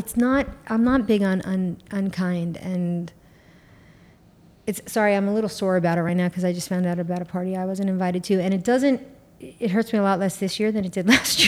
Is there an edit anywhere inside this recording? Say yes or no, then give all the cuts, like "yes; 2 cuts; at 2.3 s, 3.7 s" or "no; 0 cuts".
no; 0 cuts